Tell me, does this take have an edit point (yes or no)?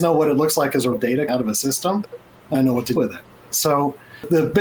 yes